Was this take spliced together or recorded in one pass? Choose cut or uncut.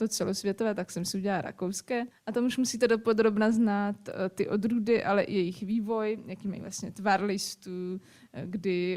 cut